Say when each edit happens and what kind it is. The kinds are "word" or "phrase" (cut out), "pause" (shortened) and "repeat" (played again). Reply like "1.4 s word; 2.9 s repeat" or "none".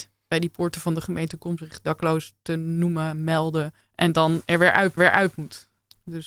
1.6 s word; 3.8 s pause; 5.0 s repeat